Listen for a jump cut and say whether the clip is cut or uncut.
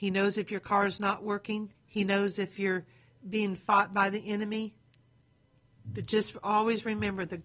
cut